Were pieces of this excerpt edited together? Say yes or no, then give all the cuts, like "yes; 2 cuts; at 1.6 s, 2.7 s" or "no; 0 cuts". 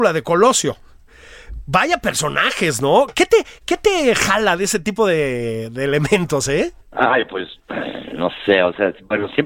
yes; 1 cut; at 6.8 s